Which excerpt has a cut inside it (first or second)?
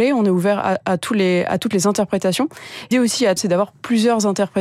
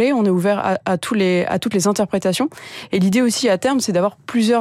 first